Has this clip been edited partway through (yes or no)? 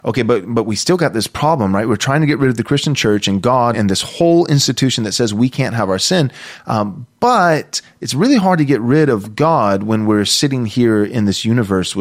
yes